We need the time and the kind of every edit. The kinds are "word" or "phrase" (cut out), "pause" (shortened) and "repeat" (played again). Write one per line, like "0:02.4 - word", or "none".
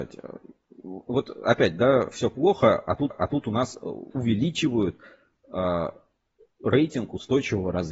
0:02.1 - word
0:03.1 - repeat
0:04.1 - word